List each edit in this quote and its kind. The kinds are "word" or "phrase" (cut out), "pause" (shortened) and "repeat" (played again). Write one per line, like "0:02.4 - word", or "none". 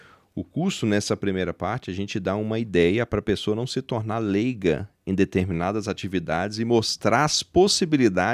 none